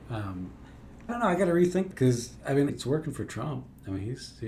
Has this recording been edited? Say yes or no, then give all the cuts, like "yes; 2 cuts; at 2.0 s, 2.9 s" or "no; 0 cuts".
yes; 3 cuts; at 1.1 s, 1.9 s, 2.7 s